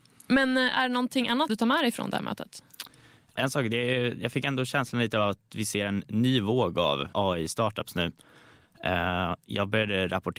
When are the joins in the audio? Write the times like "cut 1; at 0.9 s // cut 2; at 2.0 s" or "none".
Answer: cut 1; at 1.5 s // cut 2; at 7.1 s